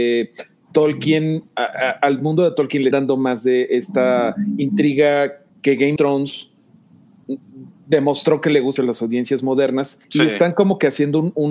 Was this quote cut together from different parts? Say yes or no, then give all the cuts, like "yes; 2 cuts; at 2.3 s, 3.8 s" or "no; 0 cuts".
yes; 5 cuts; at 2.9 s, 5.5 s, 6.0 s, 8.8 s, 10.0 s